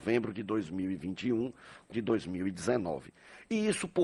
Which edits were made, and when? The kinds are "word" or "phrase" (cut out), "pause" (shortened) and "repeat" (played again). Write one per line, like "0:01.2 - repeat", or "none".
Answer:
0:01.9 - word